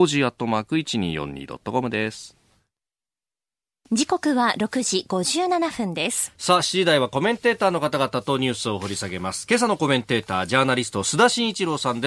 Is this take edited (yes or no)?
no